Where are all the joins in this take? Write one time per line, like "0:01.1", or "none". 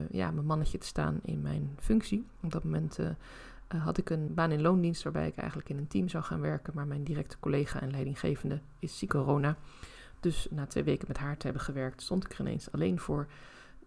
0:04.3
0:09.1